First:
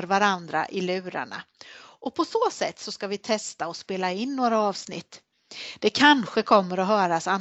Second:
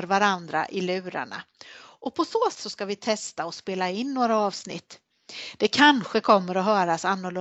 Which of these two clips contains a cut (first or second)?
second